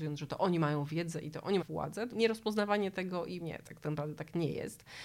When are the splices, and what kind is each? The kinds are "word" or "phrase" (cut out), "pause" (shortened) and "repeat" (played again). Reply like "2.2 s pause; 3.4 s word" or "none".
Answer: 1.6 s word; 2.1 s word; 3.4 s word